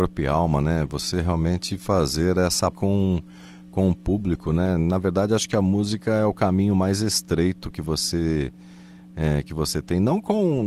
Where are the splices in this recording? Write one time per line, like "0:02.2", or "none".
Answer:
0:02.7

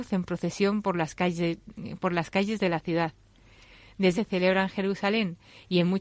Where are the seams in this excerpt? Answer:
0:04.1

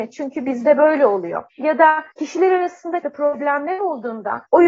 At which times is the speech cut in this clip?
0:01.5
0:02.1
0:03.0

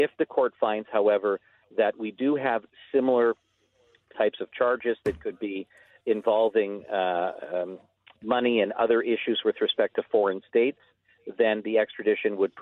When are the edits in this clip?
none

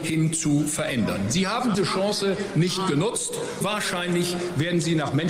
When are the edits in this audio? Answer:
0:01.7
0:03.6

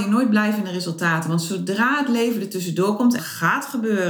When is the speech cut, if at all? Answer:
0:03.2

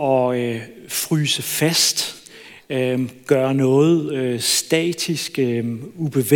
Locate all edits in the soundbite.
none

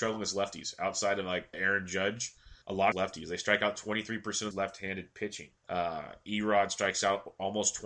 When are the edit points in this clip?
0:01.5
0:02.6
0:02.9
0:04.5
0:05.6

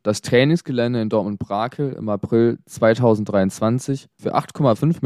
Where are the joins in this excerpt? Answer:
none

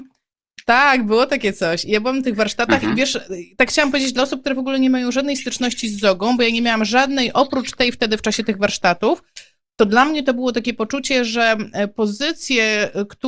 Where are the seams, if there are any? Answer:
none

